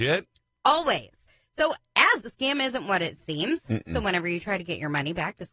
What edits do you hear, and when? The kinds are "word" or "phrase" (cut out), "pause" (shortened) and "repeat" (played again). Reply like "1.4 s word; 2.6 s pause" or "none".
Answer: 2.2 s word